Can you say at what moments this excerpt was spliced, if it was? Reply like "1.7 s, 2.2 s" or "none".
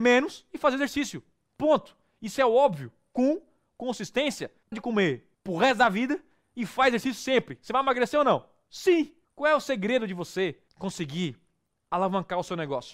4.7 s